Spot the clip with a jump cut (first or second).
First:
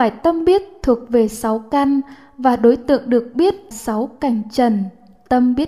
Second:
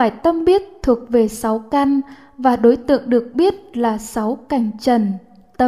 first